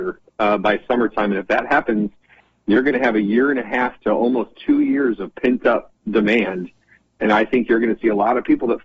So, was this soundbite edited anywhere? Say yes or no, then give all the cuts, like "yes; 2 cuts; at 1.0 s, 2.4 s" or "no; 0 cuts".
no; 0 cuts